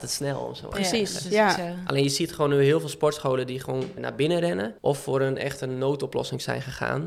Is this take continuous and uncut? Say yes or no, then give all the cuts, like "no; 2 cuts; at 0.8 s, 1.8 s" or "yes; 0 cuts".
no; 2 cuts; at 4.0 s, 4.8 s